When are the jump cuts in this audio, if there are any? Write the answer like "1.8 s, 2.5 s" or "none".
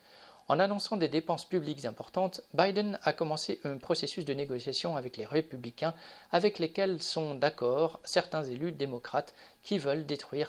none

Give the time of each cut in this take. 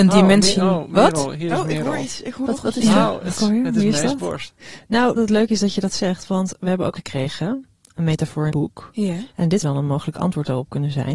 2.5 s, 3.4 s, 5.2 s, 7.0 s, 7.9 s, 8.5 s, 9.6 s

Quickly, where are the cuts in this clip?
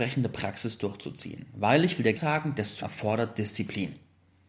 2.1 s, 2.8 s

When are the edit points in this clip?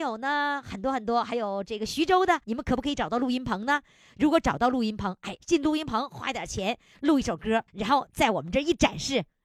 2.4 s, 5.4 s, 7.7 s

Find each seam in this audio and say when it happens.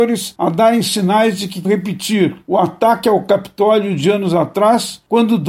1.6 s

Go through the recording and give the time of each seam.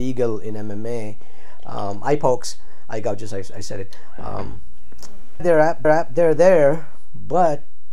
5.4 s, 5.8 s

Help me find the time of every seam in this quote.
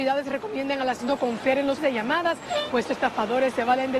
1.0 s, 1.8 s, 2.9 s

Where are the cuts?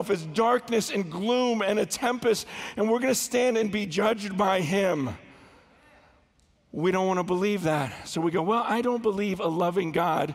none

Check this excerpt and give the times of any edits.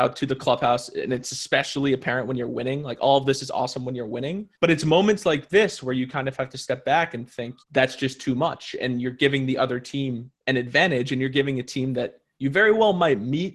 4.6 s, 7.6 s, 10.4 s

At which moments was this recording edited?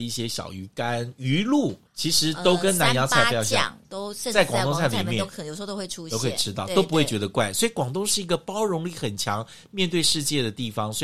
1.9 s, 3.8 s

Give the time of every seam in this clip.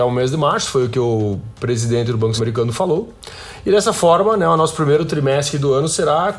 2.4 s

